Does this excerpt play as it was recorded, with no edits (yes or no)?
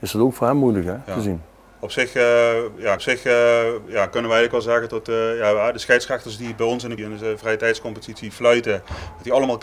no